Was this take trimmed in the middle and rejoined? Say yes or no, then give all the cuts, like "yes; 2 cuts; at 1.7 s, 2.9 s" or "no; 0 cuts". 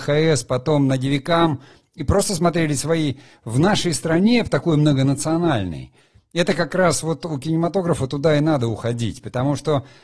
no; 0 cuts